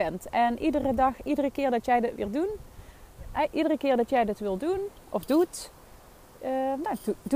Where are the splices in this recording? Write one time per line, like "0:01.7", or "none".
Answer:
none

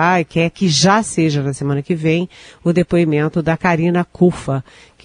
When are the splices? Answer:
none

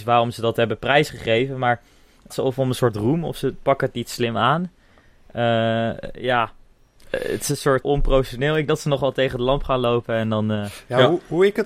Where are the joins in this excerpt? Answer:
0:02.3
0:07.8
0:08.7

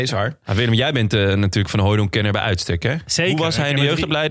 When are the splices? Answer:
none

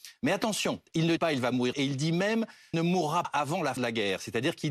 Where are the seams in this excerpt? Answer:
0:01.2
0:01.7
0:02.7
0:03.2
0:03.8

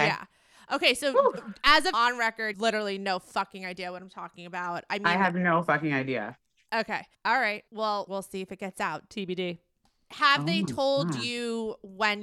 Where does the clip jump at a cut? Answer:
0:01.9
0:02.5
0:07.1
0:07.7

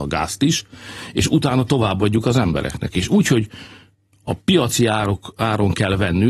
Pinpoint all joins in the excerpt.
none

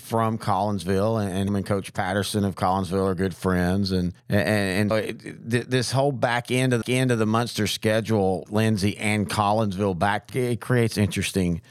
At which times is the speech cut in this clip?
0:01.5
0:04.2
0:04.9
0:06.8
0:08.5
0:10.3

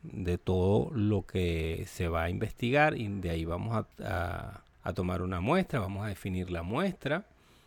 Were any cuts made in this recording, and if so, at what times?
0:03.9
0:04.7

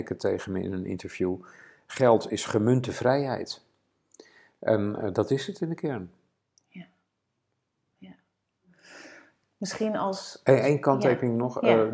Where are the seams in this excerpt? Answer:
none

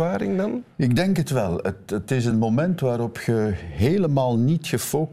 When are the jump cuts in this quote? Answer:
none

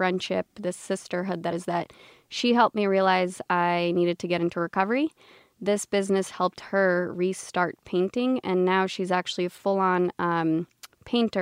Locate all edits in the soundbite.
0:01.5

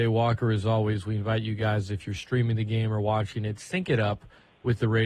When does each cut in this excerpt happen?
none

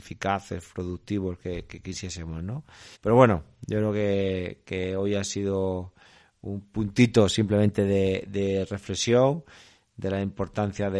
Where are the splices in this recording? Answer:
0:02.9

